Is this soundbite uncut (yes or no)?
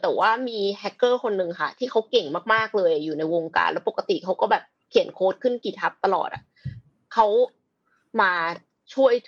yes